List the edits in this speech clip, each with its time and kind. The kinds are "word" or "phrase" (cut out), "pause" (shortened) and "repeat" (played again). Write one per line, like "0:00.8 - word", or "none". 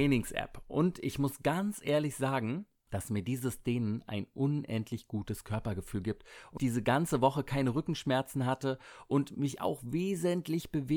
0:06.6 - word